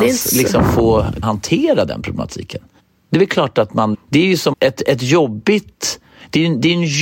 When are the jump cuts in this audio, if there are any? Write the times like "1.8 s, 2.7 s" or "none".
1.2 s, 2.8 s, 3.9 s, 4.5 s